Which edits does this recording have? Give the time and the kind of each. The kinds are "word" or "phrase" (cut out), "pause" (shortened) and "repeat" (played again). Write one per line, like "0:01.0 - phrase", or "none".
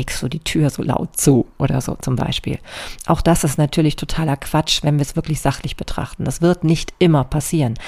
none